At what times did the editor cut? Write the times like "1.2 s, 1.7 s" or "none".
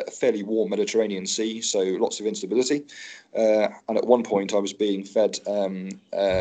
none

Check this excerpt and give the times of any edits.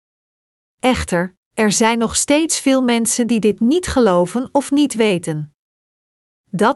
none

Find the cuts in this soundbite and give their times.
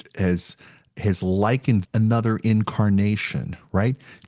1.8 s

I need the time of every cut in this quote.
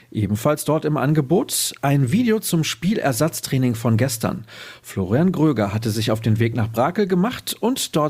none

